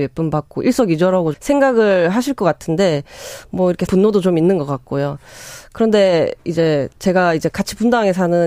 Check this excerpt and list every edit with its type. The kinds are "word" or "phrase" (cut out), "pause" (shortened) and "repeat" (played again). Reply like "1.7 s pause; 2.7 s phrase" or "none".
1.3 s word; 3.9 s word; 6.9 s pause